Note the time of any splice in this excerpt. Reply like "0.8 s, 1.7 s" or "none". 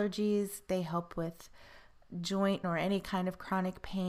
2.6 s